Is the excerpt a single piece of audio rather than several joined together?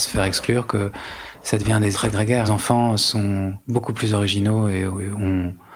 no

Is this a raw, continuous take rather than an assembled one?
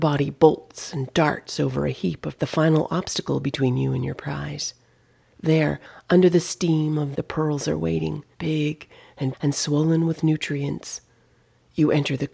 no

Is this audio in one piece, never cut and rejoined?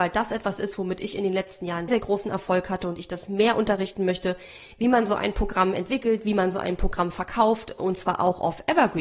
no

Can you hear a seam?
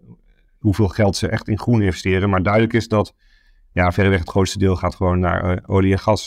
no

